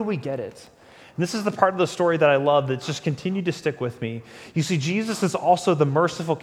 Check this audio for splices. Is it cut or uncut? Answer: uncut